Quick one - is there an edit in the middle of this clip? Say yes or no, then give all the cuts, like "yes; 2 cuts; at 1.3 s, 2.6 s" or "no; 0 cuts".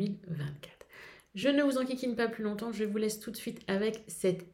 no; 0 cuts